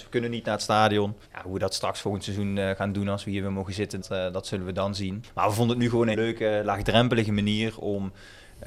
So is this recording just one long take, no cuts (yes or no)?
no